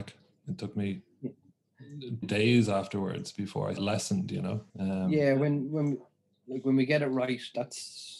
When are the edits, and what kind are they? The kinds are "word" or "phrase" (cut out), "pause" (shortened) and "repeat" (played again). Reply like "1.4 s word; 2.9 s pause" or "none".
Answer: 2.2 s word; 3.8 s phrase; 4.7 s pause